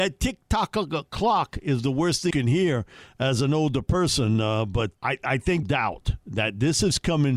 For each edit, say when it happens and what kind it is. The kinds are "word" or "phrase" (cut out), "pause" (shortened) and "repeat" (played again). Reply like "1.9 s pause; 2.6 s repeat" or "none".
2.3 s word; 4.9 s word; 5.6 s phrase